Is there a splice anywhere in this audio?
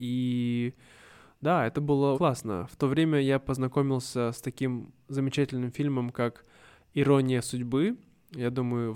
yes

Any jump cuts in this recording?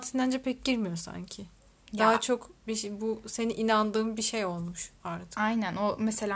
no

